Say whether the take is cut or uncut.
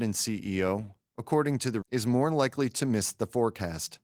cut